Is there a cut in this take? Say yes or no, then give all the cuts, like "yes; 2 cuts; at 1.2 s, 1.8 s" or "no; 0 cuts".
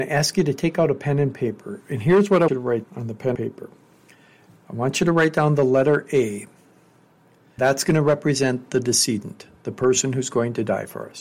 yes; 4 cuts; at 2.5 s, 2.8 s, 3.4 s, 7.6 s